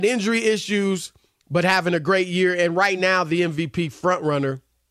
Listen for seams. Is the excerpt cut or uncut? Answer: uncut